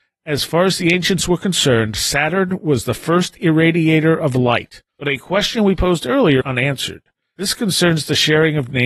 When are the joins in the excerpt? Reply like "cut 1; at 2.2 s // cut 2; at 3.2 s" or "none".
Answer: cut 1; at 4.9 s // cut 2; at 6.4 s